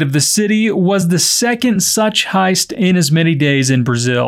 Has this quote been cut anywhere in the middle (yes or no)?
no